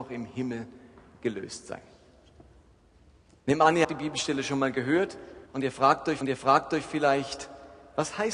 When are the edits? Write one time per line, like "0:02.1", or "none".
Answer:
0:03.8
0:05.5
0:06.2